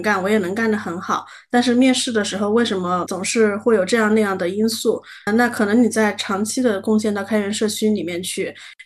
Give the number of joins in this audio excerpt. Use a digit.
2